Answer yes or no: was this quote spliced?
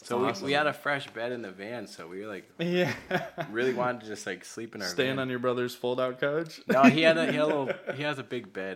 no